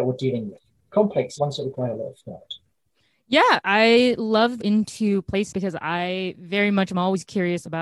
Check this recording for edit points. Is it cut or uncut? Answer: cut